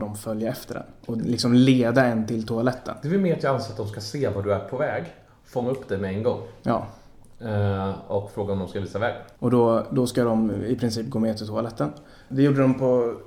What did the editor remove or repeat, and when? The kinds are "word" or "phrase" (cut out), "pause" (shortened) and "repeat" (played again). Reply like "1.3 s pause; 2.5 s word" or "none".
1.0 s pause